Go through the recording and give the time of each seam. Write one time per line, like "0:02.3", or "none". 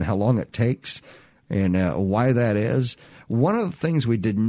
none